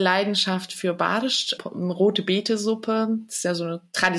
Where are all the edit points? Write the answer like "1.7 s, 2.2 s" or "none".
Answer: 1.6 s